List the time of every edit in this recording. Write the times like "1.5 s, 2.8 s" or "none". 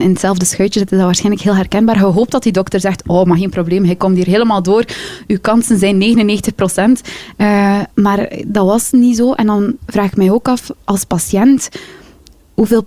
7.9 s